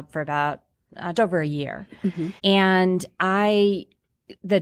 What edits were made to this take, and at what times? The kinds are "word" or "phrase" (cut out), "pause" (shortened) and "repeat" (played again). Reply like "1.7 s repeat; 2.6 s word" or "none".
1.1 s word; 2.4 s pause